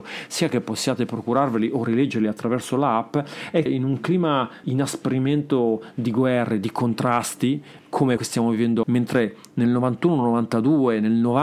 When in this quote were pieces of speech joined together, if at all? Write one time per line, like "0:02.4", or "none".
0:03.7
0:04.6
0:08.2
0:08.8

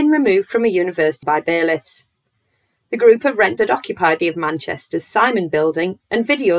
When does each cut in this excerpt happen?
0:01.2
0:03.6
0:04.2

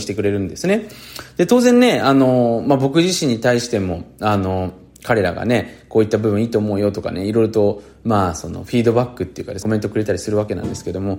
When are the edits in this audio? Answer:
0:09.6

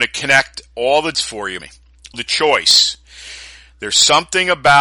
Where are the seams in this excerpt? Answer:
0:01.1
0:01.6
0:02.1

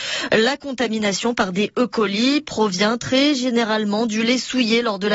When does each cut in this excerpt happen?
none

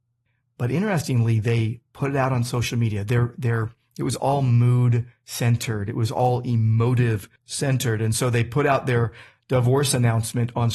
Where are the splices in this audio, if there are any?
0:07.4

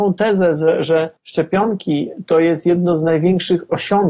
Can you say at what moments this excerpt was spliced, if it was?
0:01.2

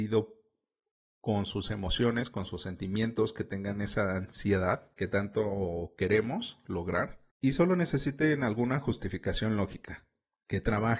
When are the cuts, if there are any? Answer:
0:04.9
0:07.3

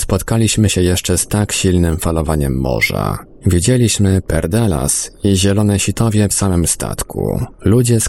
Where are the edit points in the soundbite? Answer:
0:06.3

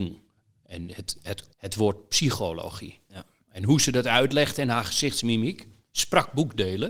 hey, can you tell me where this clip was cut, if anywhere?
0:01.5

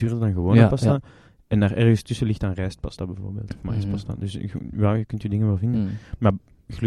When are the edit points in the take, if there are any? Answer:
none

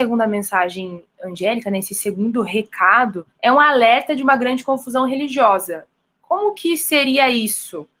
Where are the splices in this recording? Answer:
0:03.3

